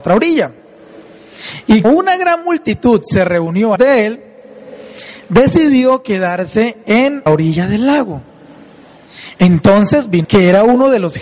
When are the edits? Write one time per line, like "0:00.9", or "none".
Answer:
0:01.8
0:03.8
0:07.3
0:10.2